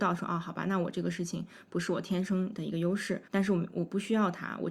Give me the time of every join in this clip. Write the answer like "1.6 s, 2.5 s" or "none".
3.3 s